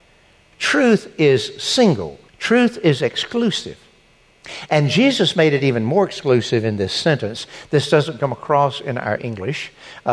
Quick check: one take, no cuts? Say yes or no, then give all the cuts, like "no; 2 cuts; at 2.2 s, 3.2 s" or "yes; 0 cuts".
no; 1 cut; at 2.3 s